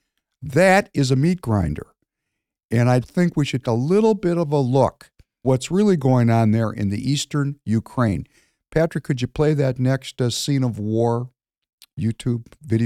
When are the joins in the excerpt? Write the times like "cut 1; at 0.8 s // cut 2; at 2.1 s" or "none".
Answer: cut 1; at 3.0 s // cut 2; at 3.6 s // cut 3; at 5.4 s